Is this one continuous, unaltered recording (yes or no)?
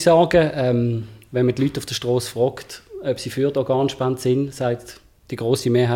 yes